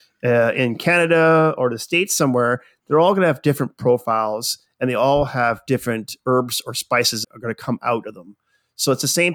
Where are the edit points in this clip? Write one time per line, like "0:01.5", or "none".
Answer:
0:07.2